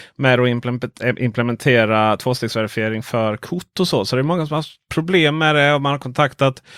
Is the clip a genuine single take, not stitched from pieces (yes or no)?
yes